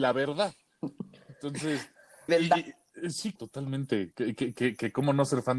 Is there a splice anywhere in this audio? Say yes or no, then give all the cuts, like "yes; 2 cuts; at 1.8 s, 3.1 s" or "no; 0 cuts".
yes; 2 cuts; at 2.3 s, 3.4 s